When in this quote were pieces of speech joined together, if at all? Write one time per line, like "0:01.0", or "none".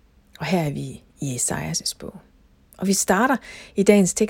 none